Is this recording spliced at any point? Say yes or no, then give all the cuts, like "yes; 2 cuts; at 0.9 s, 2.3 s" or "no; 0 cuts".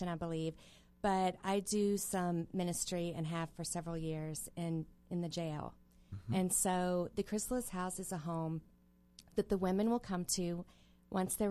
no; 0 cuts